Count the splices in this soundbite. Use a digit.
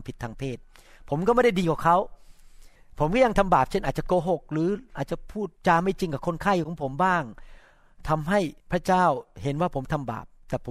3